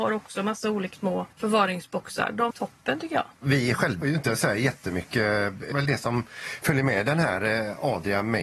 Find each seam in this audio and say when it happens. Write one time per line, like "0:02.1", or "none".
0:00.9
0:01.3
0:02.5
0:03.3
0:04.0
0:05.7

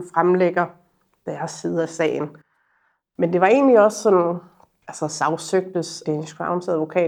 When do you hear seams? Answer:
0:06.0

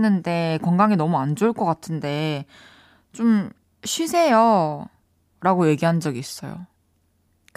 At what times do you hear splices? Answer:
none

